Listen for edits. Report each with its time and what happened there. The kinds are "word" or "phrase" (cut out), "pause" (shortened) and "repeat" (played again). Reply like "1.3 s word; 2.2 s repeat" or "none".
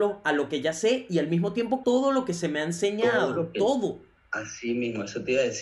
1.8 s word